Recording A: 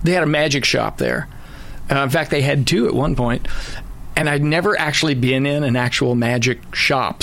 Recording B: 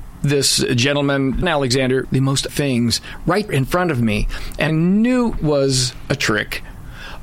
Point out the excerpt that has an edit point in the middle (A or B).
B